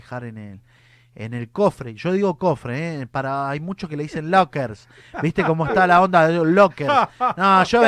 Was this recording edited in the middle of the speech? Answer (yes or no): no